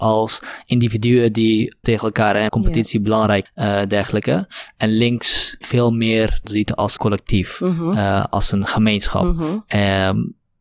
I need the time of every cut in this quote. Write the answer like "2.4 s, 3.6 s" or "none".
1.8 s, 2.5 s, 3.5 s, 5.6 s, 6.4 s, 7.0 s